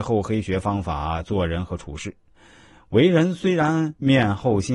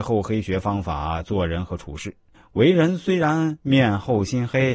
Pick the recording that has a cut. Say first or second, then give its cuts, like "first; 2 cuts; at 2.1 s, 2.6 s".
second; 1 cut; at 2.3 s